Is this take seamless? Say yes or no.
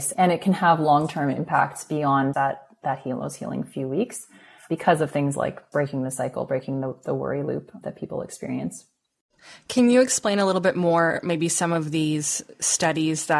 no